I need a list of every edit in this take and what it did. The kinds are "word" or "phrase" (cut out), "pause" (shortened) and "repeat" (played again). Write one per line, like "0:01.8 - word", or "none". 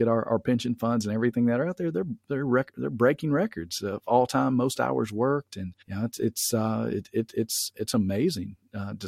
0:05.8 - pause